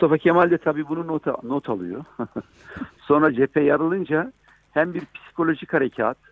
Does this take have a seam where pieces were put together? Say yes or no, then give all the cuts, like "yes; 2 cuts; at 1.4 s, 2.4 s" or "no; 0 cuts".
no; 0 cuts